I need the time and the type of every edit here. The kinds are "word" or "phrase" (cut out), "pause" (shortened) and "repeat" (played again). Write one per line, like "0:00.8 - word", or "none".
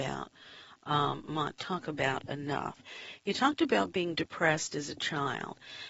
0:01.6 - phrase

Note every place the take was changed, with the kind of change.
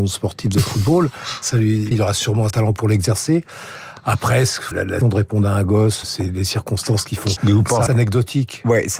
0:01.5 - word
0:01.9 - word
0:02.5 - word
0:04.7 - word
0:05.0 - word
0:06.0 - word
0:07.4 - word
0:07.9 - word

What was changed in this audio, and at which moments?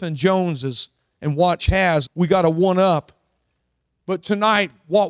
0:01.6 - word
0:02.1 - word

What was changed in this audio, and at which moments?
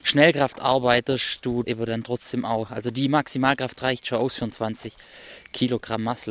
0:01.6 - word

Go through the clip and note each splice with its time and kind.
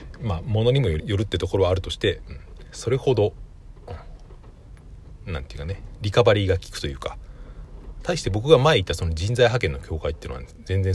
0:01.0 - word

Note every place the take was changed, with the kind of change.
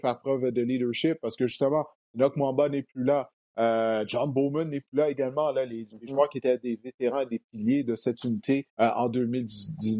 0:08.7 - pause

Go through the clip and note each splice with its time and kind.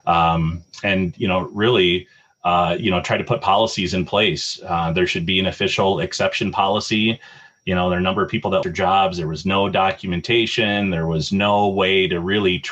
0:08.6 - word

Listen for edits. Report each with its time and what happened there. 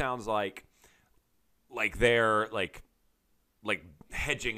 none

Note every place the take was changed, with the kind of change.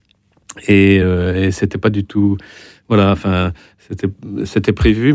none

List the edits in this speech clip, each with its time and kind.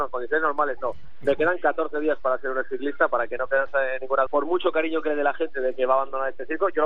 0:04.3 - word

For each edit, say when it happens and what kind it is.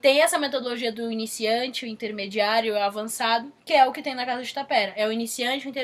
0:03.6 - pause

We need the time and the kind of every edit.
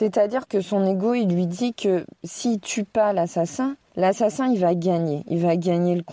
0:02.1 - pause
0:03.8 - pause

